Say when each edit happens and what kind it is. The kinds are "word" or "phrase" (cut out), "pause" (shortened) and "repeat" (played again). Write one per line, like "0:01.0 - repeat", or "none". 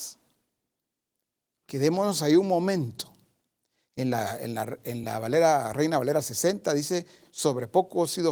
none

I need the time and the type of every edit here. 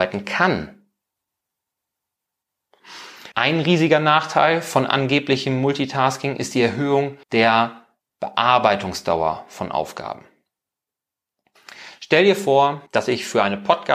0:03.3 - pause
0:07.2 - pause
0:12.9 - pause

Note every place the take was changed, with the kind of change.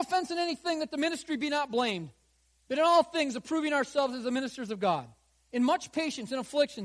none

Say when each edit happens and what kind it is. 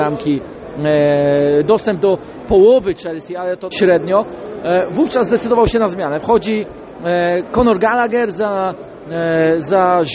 0:03.7 - word

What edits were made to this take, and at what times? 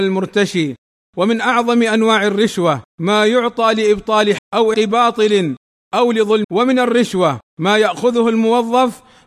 0:02.9 - pause
0:04.4 - word
0:04.7 - word
0:06.4 - word
0:07.5 - pause

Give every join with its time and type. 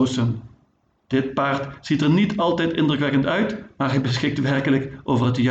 none

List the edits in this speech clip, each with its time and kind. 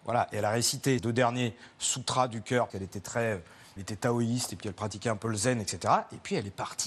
0:01.0 - word
0:02.7 - word
0:03.8 - word

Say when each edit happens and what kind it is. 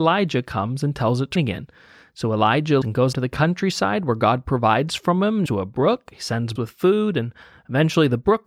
0:01.4 - word
0:02.8 - word
0:03.1 - word
0:05.5 - word
0:06.6 - word

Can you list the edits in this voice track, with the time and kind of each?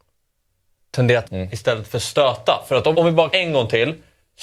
0:01.2 - word
0:02.9 - word
0:03.3 - word

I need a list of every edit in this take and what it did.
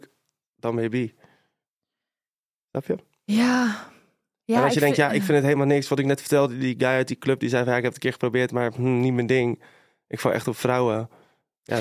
none

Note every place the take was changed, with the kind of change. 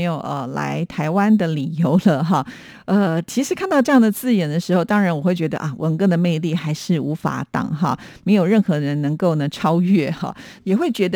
none

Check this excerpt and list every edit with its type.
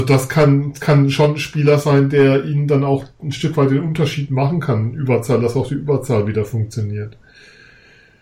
none

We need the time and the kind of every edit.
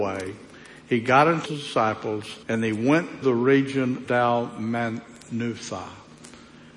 0:01.5 - phrase
0:02.4 - pause
0:03.2 - word
0:04.1 - word

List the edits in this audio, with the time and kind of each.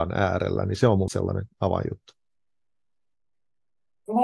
0:01.1 - word

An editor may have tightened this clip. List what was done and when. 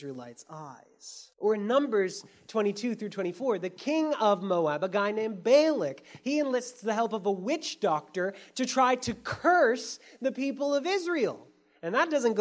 0:01.3 - pause

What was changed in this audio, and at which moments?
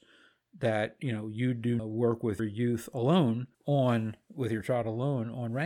0:01.8 - phrase
0:02.4 - word
0:03.5 - pause

